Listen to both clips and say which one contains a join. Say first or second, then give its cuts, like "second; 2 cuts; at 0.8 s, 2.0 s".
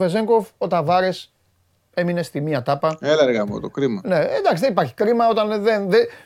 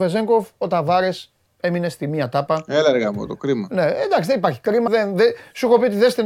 second; 2 cuts; at 1.5 s, 4.9 s